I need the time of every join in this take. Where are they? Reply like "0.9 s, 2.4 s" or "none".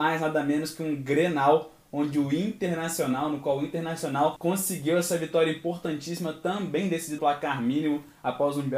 7.2 s